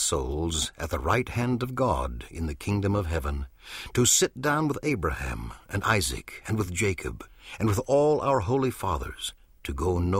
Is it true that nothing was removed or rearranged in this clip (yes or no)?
yes